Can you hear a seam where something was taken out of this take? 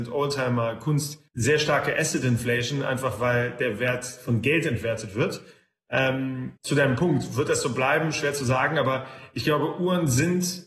yes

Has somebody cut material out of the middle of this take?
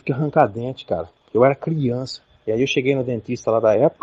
no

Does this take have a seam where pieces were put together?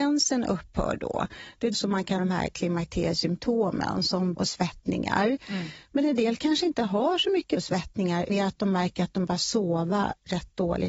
yes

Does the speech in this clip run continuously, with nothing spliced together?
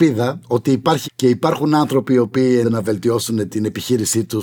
no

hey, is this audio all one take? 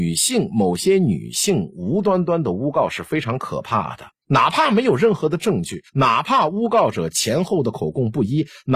no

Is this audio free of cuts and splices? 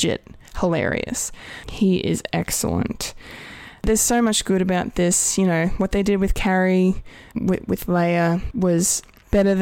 yes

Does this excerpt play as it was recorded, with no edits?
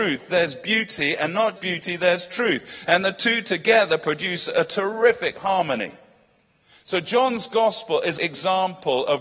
no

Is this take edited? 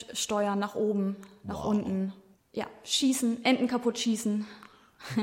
no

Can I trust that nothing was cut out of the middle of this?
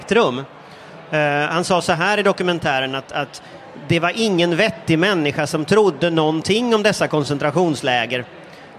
yes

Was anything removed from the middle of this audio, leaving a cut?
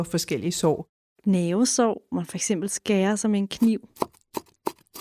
yes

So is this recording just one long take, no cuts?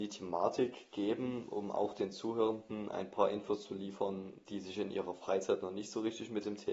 yes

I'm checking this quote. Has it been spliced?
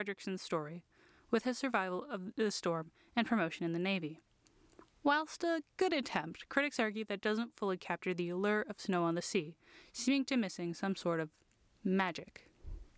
no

